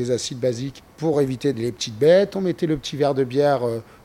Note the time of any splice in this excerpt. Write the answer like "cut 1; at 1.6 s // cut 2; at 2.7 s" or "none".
none